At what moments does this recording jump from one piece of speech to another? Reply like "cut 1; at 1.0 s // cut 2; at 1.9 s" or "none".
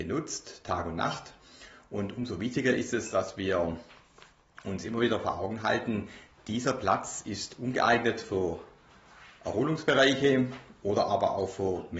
none